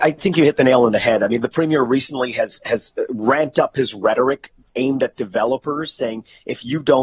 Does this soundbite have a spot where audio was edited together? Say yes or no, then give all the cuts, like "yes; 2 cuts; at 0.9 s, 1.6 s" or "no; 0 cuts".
no; 0 cuts